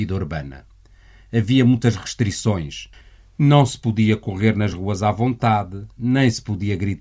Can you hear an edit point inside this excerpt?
no; 0 cuts

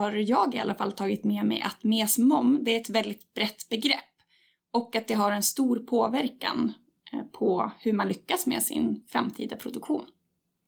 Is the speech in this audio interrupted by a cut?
no; 0 cuts

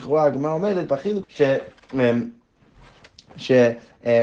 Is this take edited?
yes; 1 cut; at 1.2 s

